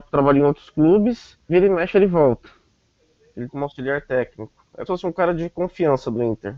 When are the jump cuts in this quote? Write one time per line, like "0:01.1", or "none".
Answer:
0:01.5
0:03.5
0:04.9